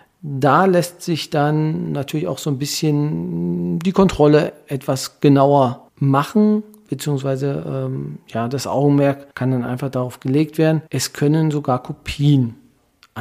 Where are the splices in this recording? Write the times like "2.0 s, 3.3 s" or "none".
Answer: 5.9 s, 9.3 s, 10.9 s

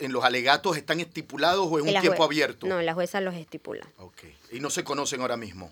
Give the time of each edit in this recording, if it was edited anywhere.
none

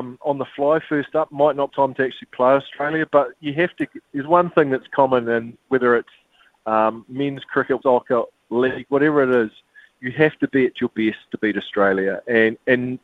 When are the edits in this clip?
1.7 s, 4.1 s, 7.8 s

